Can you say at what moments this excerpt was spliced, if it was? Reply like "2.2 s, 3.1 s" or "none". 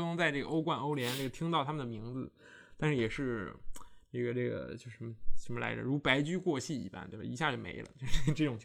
none